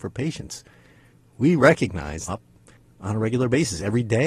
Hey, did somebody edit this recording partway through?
yes; 1 cut; at 2.3 s

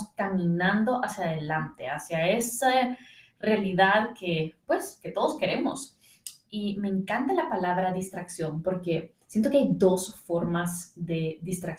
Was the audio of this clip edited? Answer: no; 0 cuts

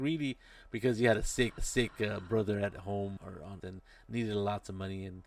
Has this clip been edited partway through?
yes; 3 cuts; at 1.6 s, 3.2 s, 3.6 s

